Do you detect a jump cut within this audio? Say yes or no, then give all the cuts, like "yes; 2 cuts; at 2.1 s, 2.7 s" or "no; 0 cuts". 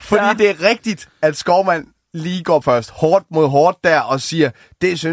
yes; 1 cut; at 2.6 s